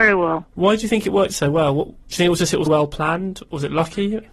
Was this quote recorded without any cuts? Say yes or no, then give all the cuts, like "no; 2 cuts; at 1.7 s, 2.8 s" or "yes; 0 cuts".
no; 1 cut; at 2.7 s